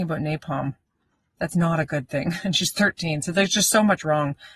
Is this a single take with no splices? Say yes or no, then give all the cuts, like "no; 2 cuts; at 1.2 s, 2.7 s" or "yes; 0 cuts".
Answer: yes; 0 cuts